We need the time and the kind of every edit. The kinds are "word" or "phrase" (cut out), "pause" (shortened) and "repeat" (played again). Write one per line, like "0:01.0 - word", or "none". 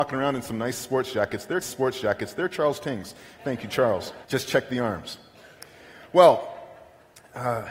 0:01.6 - repeat
0:04.2 - pause